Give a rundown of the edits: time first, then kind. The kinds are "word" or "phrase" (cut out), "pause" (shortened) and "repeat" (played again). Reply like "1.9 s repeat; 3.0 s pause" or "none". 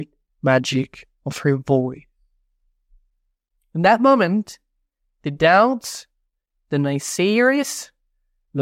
none